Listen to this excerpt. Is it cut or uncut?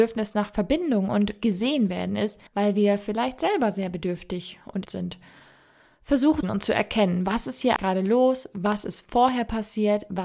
cut